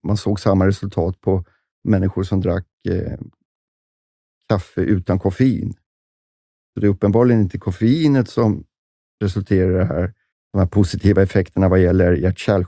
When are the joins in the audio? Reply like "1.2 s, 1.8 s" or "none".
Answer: 10.3 s

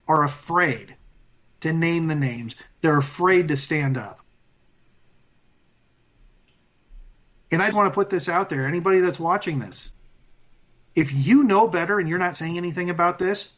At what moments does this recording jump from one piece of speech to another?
7.7 s

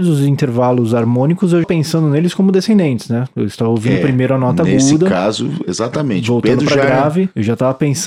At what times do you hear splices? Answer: 1.6 s

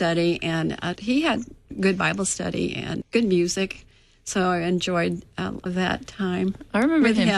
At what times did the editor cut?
1.0 s, 3.0 s, 5.7 s

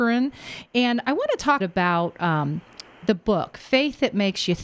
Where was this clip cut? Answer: 1.6 s

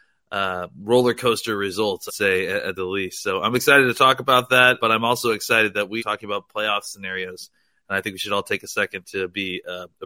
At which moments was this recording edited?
2.1 s, 2.8 s, 4.8 s, 6.0 s

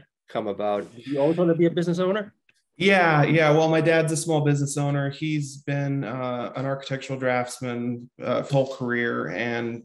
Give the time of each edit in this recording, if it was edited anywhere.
8.5 s

